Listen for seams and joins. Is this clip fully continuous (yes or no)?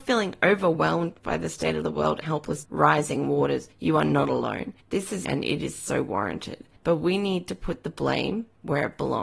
no